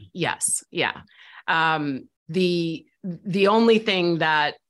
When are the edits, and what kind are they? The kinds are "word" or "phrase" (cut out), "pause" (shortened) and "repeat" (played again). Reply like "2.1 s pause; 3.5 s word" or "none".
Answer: 2.2 s pause